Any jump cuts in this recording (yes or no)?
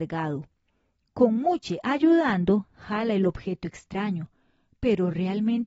no